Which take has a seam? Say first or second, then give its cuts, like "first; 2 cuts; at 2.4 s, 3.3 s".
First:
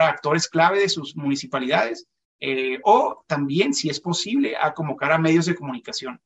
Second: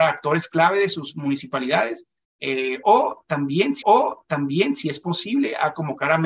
second; 1 cut; at 3.8 s